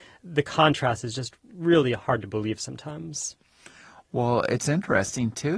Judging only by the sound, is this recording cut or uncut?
uncut